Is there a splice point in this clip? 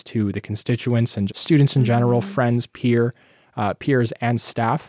yes; 1 cut; at 1.3 s

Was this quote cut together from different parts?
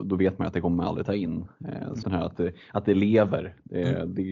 yes; 1 cut; at 2.0 s

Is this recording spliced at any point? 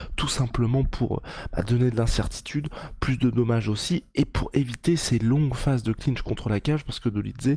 no; 0 cuts

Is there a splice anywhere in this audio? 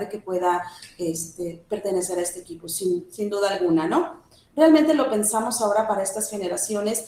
no; 0 cuts

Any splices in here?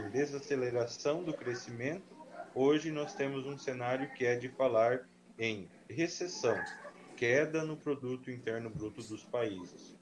no; 0 cuts

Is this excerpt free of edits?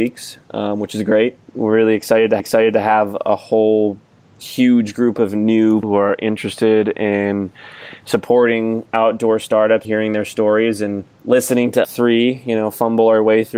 no; 7 cuts; at 1.5 s, 2.4 s, 4.3 s, 5.8 s, 9.8 s, 11.1 s, 11.8 s

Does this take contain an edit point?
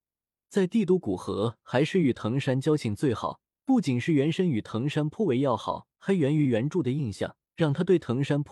yes; 3 cuts; at 3.5 s, 5.9 s, 7.5 s

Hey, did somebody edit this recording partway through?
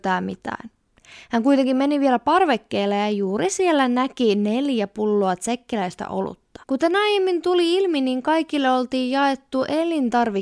yes; 1 cut; at 6.6 s

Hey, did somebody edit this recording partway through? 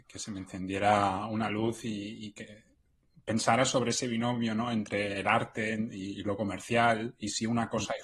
no; 0 cuts

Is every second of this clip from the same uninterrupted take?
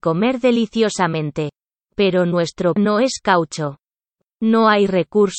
no; 1 cut; at 2.8 s

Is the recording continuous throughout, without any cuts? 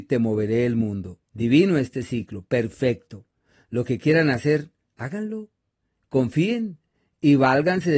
no; 1 cut; at 1.2 s

